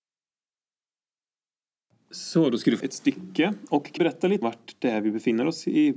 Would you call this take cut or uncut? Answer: cut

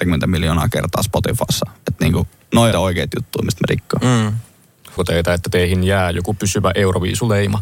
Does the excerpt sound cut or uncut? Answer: cut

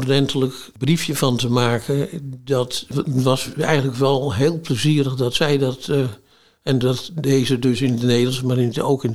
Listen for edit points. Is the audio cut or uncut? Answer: uncut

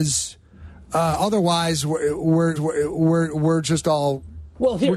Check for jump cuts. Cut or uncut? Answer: cut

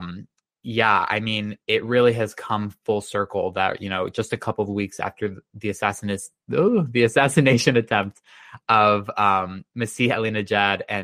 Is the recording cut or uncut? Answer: uncut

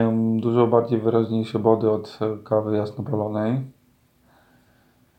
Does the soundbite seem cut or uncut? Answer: uncut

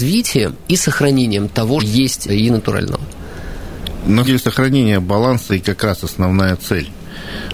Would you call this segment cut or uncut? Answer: cut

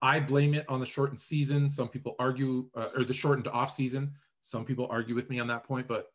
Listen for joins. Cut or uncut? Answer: uncut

